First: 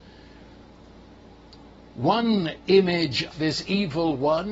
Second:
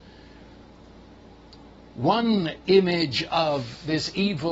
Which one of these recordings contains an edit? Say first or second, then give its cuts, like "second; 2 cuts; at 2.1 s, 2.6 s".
first; 1 cut; at 3.3 s